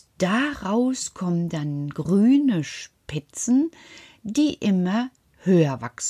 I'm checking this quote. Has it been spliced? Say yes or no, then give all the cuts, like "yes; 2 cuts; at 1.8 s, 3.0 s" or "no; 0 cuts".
no; 0 cuts